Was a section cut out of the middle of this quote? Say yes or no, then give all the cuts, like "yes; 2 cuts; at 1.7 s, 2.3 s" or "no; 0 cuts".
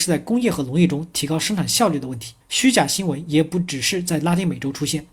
yes; 1 cut; at 2.4 s